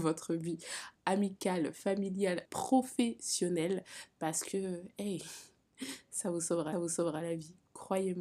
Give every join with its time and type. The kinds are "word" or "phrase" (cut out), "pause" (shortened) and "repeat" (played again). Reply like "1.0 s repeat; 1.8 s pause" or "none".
2.5 s word; 6.7 s repeat